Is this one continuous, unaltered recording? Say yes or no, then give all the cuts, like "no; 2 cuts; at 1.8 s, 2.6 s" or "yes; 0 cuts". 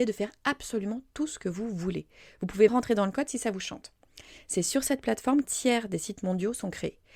no; 2 cuts; at 2.7 s, 5.4 s